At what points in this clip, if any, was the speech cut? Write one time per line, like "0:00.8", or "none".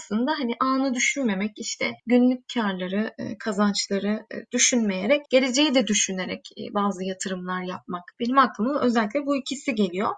0:02.0
0:05.3
0:08.1